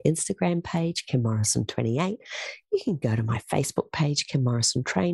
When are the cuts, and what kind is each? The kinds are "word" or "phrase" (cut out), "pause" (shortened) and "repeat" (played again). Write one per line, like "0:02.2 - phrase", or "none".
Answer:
none

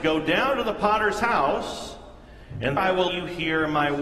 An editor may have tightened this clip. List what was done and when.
0:02.8 - word
0:03.1 - word

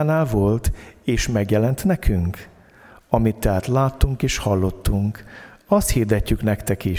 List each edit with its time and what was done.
none

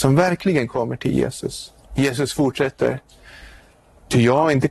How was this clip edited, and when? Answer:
0:01.8 - pause

